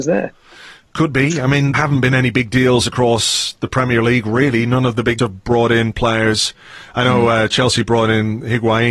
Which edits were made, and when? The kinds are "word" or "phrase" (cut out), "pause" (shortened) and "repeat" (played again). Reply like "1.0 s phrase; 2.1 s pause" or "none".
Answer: 1.7 s phrase; 5.2 s word

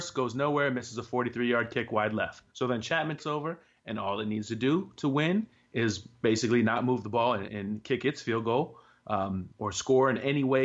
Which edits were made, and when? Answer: 2.5 s pause; 3.2 s word; 7.5 s word

